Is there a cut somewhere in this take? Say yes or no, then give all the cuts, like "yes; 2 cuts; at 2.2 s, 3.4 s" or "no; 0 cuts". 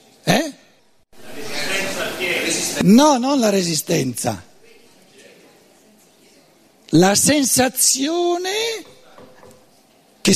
no; 0 cuts